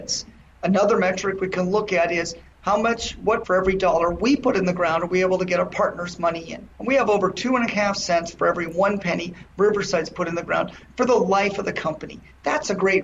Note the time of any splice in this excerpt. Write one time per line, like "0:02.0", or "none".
0:03.4
0:06.7